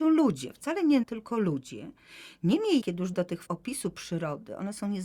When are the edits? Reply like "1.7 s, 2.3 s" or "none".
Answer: 1.0 s, 2.8 s, 3.1 s, 3.5 s